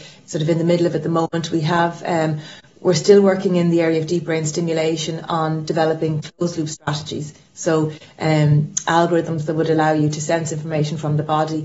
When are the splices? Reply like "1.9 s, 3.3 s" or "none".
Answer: none